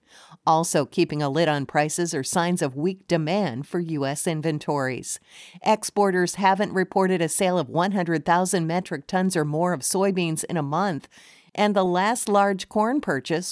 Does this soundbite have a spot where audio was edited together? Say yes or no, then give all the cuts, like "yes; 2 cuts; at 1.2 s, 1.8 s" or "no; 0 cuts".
no; 0 cuts